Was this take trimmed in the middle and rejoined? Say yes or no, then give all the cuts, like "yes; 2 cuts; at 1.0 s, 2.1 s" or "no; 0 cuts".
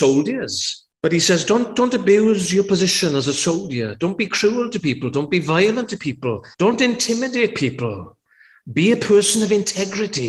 yes; 2 cuts; at 0.9 s, 6.5 s